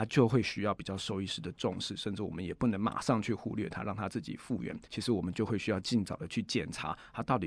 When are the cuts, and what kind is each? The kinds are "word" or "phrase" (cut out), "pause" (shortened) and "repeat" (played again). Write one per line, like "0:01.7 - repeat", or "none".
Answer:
0:04.8 - pause